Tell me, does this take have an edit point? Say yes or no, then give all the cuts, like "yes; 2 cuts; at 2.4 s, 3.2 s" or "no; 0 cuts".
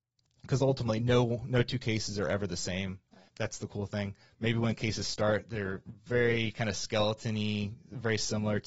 yes; 2 cuts; at 3.3 s, 6.0 s